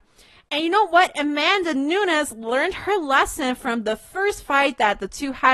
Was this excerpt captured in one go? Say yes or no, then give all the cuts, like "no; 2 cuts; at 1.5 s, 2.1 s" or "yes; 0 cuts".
yes; 0 cuts